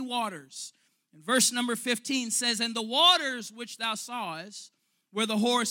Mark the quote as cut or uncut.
uncut